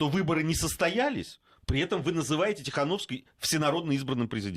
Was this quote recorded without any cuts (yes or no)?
yes